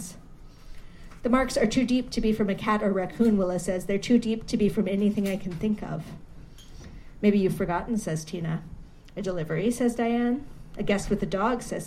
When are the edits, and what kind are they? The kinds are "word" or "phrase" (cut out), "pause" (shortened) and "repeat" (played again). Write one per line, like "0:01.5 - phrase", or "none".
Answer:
none